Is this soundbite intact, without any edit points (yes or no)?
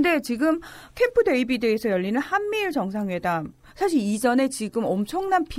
yes